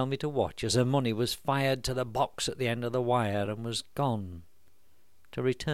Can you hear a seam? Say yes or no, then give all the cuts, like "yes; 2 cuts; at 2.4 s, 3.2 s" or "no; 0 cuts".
no; 0 cuts